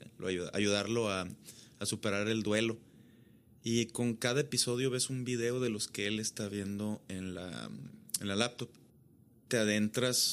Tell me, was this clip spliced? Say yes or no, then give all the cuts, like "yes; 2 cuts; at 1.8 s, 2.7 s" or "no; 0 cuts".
no; 0 cuts